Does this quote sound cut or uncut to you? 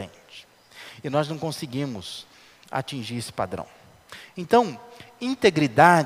uncut